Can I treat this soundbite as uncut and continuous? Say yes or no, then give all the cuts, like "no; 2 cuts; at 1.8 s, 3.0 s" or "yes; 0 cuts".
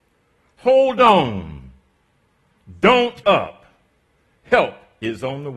no; 1 cut; at 3.2 s